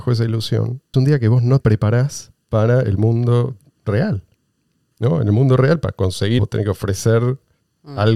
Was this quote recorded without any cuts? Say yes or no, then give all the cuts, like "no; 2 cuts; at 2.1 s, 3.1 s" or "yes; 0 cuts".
no; 3 cuts; at 0.9 s, 1.6 s, 6.4 s